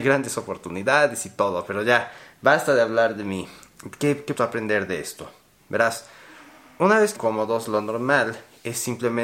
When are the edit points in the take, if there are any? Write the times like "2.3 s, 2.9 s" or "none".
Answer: 4.4 s, 7.2 s